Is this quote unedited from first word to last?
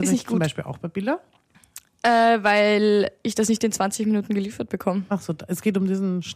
yes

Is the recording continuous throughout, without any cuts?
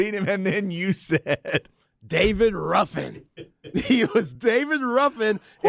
yes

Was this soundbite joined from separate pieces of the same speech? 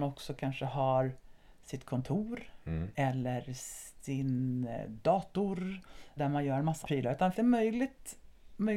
yes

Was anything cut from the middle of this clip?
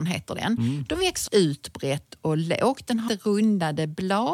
yes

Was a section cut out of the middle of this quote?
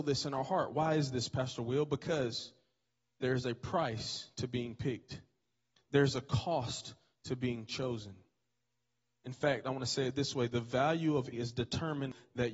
yes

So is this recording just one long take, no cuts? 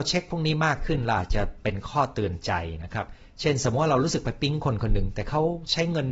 yes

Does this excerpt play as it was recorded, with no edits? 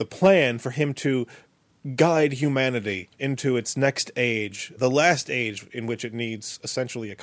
no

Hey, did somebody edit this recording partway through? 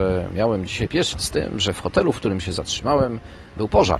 yes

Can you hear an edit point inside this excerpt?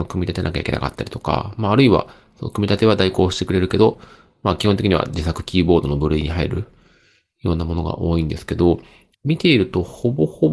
no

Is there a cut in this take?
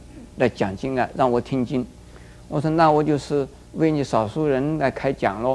yes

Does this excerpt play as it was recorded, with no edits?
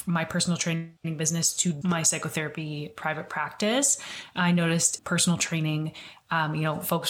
no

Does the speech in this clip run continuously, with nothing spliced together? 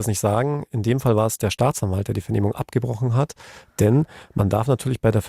yes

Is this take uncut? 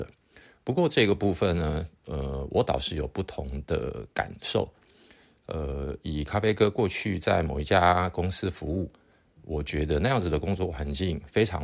yes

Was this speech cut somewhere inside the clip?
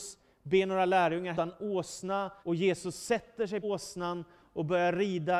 yes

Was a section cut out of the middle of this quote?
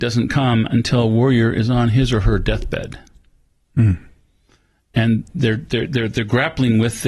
no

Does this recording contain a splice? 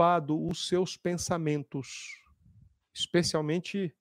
no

